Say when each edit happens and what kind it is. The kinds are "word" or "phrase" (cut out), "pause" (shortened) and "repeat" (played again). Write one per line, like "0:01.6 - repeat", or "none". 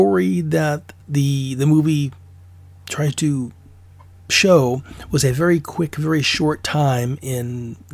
none